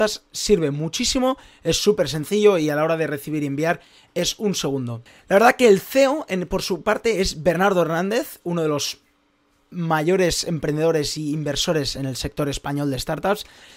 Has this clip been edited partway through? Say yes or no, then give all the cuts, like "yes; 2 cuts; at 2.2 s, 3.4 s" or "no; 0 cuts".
no; 0 cuts